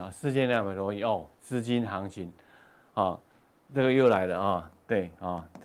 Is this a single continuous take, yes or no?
yes